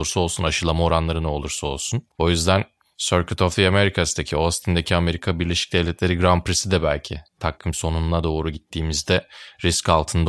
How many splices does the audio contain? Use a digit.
1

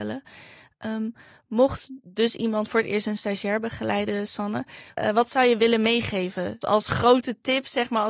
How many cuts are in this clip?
1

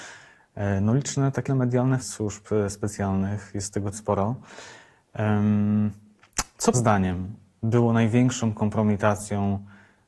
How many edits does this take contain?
4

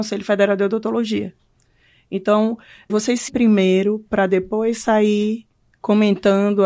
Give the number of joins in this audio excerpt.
2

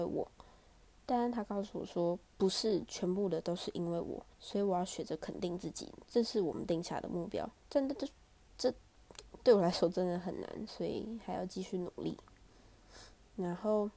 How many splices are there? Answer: 3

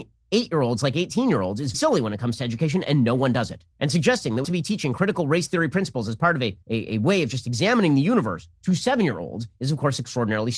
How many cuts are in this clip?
4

